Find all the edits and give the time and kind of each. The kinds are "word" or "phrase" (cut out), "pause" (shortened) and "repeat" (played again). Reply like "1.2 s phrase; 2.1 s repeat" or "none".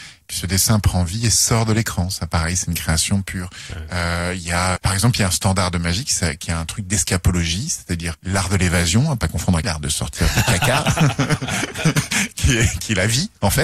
4.8 s word; 8.1 s word; 9.6 s word

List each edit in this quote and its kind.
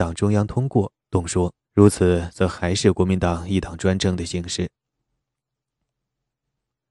1.0 s pause; 1.6 s pause

